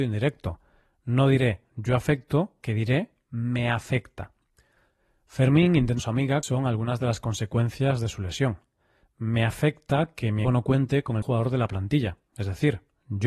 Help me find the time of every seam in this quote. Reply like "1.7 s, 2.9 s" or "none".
2.6 s, 6.0 s, 6.4 s, 10.4 s, 11.2 s